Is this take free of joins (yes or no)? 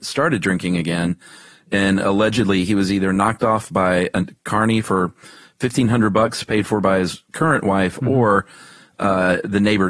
yes